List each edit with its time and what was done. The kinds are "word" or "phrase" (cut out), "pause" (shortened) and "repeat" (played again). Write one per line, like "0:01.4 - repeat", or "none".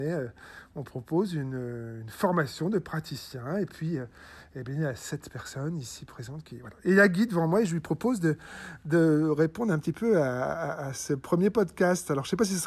none